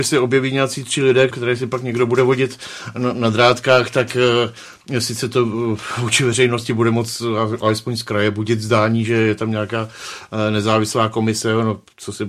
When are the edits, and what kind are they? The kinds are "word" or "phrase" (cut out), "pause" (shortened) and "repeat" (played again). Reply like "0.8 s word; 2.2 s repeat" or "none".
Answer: 1.3 s word